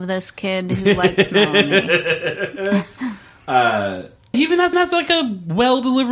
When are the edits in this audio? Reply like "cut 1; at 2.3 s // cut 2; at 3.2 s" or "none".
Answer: cut 1; at 4.3 s // cut 2; at 4.7 s